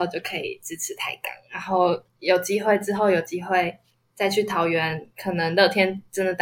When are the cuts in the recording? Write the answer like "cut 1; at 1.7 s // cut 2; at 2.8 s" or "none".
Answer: cut 1; at 2.1 s